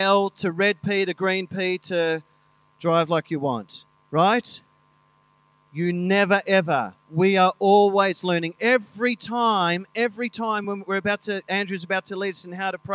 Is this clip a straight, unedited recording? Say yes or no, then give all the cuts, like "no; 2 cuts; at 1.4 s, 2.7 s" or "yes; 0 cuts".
yes; 0 cuts